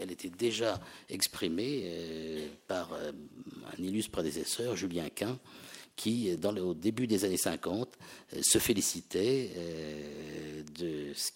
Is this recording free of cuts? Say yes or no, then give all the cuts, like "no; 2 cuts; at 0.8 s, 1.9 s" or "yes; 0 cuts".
yes; 0 cuts